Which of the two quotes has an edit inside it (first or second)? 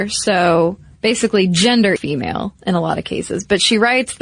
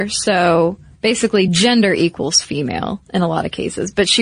first